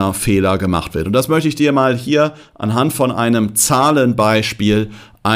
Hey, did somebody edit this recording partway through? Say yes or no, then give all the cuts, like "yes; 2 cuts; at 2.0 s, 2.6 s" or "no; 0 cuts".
no; 0 cuts